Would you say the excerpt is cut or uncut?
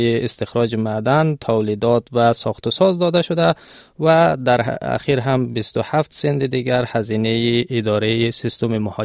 uncut